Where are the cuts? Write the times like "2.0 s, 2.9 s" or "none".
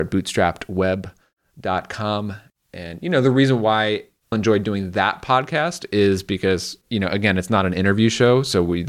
4.3 s